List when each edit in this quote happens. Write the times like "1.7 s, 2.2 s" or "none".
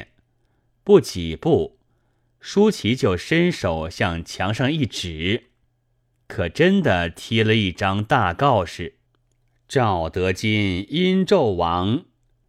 9.1 s